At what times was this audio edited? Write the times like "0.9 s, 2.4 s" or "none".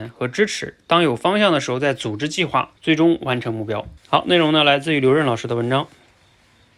2.8 s, 4.0 s